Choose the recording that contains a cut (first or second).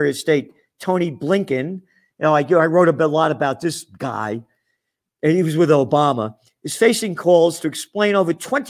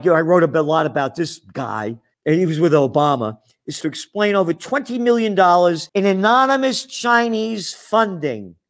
second